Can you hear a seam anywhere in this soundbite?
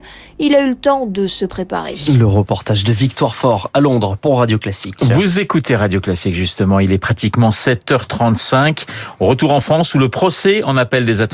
no; 0 cuts

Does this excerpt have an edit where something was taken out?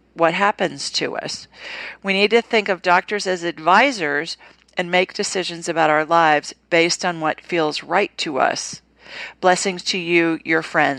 no; 0 cuts

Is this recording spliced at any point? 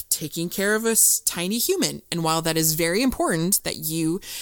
no; 0 cuts

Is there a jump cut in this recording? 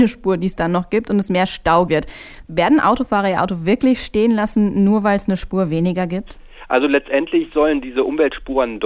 yes; 1 cut; at 1.9 s

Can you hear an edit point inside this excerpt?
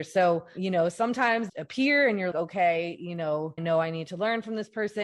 yes; 3 cuts; at 1.5 s, 2.3 s, 3.6 s

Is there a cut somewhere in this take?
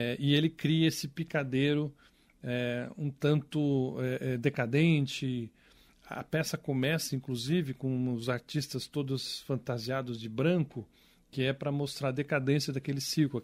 no; 0 cuts

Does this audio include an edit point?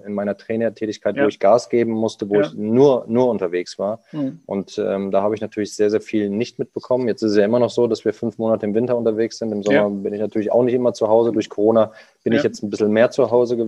no; 0 cuts

